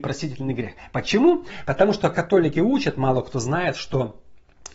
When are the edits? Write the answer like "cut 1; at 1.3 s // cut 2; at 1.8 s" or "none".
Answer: none

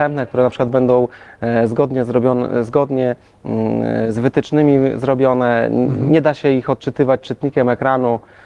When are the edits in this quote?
none

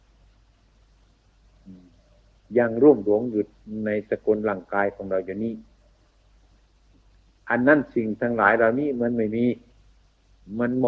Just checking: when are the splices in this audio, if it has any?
none

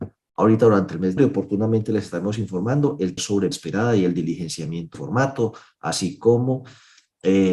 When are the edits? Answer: cut 1; at 1.2 s // cut 2; at 3.2 s // cut 3; at 3.5 s // cut 4; at 4.9 s

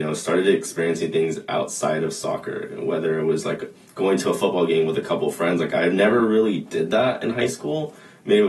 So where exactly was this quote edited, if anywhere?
none

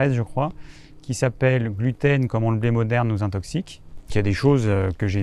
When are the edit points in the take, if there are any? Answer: cut 1; at 4.1 s

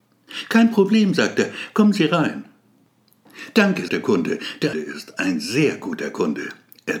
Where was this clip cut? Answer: cut 1; at 3.9 s // cut 2; at 4.7 s

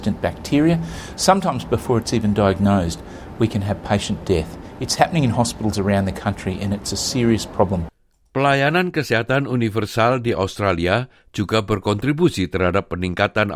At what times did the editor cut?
none

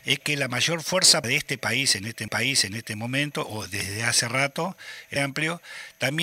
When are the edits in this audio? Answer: cut 1; at 1.2 s // cut 2; at 2.3 s // cut 3; at 5.2 s

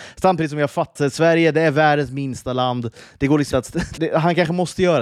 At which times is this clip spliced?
cut 1; at 1.0 s // cut 2; at 3.5 s // cut 3; at 4.0 s

